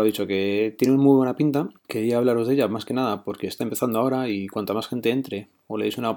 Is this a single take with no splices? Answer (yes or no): no